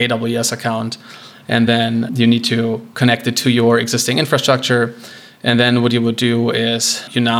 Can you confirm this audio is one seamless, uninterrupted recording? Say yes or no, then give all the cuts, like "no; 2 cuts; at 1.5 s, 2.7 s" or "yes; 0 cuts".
yes; 0 cuts